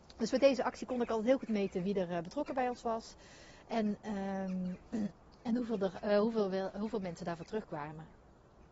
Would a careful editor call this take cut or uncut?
uncut